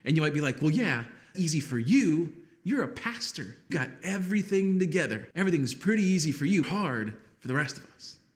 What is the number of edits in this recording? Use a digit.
4